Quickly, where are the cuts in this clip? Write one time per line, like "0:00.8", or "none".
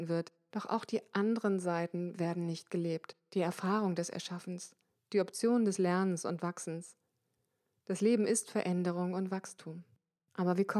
none